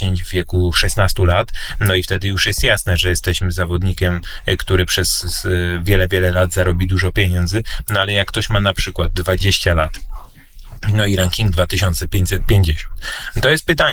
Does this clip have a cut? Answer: no; 0 cuts

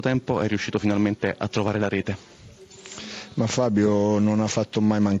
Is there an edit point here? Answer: no; 0 cuts

